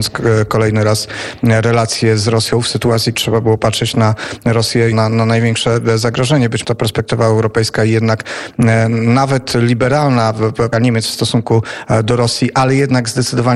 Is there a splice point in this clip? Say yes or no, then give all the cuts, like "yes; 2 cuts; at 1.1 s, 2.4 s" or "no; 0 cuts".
yes; 4 cuts; at 3.1 s, 4.9 s, 6.6 s, 10.7 s